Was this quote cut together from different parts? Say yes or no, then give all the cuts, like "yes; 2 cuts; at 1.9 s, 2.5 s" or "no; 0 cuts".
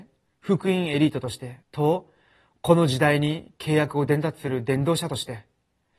yes; 1 cut; at 1.6 s